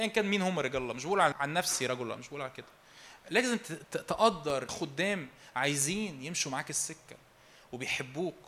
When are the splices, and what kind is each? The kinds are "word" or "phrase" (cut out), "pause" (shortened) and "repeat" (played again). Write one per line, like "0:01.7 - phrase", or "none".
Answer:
0:01.3 - word
0:04.7 - phrase